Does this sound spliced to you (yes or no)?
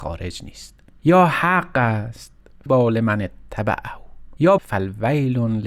yes